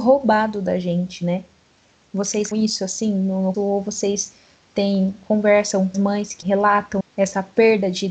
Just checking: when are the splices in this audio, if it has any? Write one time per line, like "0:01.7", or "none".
0:02.5
0:03.5
0:05.9
0:06.4
0:07.0